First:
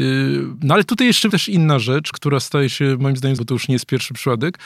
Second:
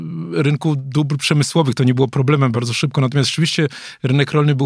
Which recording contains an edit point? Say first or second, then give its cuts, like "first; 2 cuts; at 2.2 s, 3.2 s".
first; 3 cuts; at 1.3 s, 2.1 s, 3.4 s